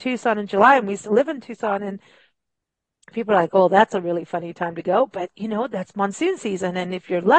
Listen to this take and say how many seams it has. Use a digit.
0